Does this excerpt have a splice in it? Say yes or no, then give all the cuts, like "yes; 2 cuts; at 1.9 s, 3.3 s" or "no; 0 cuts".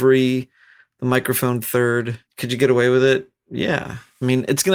yes; 1 cut; at 2.3 s